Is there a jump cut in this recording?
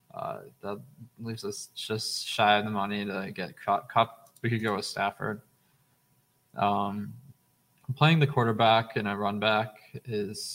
no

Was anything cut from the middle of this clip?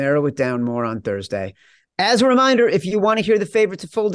no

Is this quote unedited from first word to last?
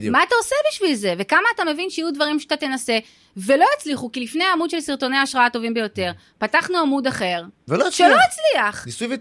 yes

